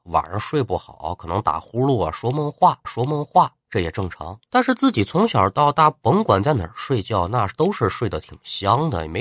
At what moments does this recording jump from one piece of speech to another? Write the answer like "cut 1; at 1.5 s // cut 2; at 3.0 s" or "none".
cut 1; at 2.8 s // cut 2; at 4.5 s